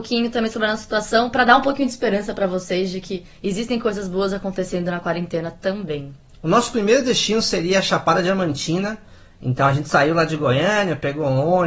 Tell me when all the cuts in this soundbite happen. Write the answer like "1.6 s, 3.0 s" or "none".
none